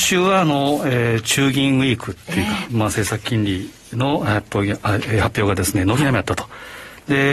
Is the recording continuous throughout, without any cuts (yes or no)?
yes